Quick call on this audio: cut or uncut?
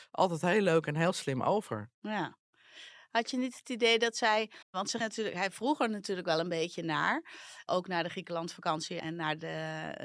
cut